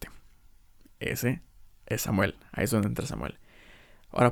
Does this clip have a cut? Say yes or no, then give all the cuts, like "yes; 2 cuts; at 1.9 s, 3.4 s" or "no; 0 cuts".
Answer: no; 0 cuts